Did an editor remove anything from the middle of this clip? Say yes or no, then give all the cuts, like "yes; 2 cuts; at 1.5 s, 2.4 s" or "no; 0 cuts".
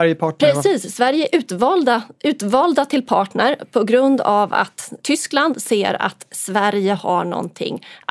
no; 0 cuts